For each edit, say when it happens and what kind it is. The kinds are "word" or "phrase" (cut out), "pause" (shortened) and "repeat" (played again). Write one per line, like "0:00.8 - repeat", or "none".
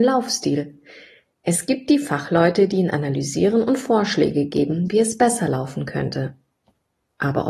none